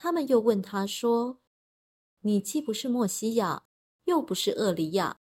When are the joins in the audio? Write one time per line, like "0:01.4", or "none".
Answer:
none